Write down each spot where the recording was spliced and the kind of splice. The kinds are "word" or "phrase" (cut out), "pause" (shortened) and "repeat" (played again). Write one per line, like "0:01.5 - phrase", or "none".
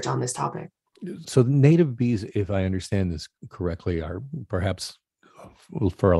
0:01.2 - word